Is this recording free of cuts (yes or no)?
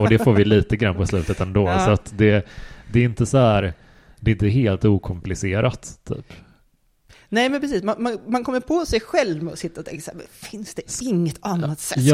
yes